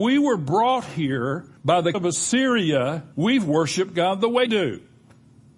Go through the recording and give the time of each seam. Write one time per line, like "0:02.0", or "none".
0:01.6
0:01.9
0:03.1
0:04.5